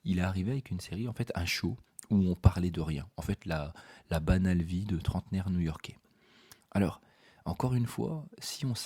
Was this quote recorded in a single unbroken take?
yes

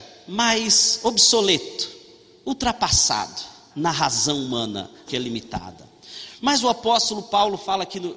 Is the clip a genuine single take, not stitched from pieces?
no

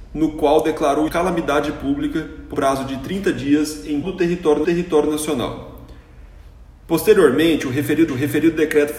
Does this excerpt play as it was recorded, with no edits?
no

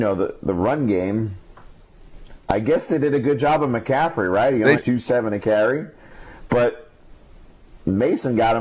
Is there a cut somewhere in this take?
yes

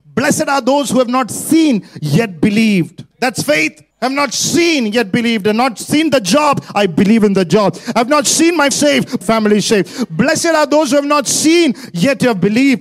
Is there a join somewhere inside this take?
yes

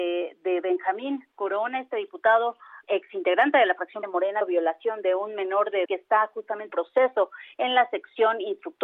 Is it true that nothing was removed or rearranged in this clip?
no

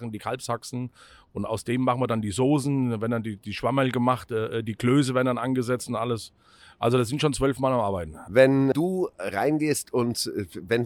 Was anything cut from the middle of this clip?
no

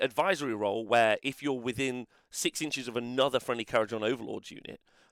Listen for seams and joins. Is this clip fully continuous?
yes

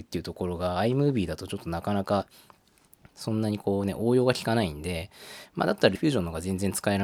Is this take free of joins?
no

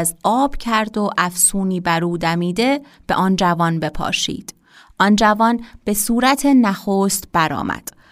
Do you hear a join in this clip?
no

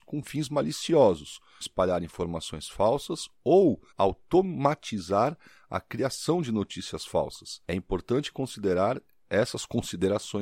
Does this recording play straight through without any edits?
no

